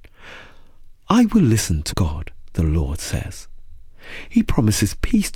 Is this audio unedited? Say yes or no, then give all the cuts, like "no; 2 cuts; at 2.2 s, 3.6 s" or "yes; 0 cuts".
no; 1 cut; at 1.9 s